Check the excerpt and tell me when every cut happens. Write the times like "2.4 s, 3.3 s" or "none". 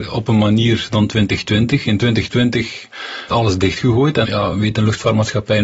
3.3 s, 4.2 s